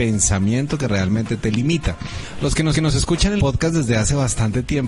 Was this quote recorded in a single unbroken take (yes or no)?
no